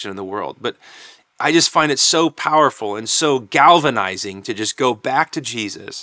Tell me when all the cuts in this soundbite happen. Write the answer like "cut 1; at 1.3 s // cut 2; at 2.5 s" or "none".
none